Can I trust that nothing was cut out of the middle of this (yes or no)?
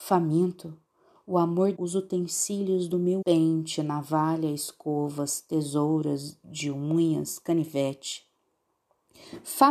no